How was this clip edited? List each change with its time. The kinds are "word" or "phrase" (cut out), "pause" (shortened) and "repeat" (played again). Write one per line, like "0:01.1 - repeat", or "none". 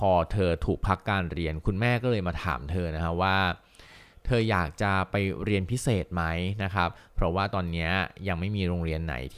none